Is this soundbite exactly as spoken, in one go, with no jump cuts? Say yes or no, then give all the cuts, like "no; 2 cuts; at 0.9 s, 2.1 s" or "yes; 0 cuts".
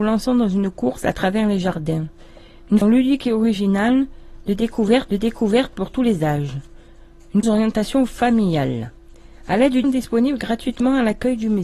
no; 4 cuts; at 2.8 s, 5.1 s, 7.4 s, 9.8 s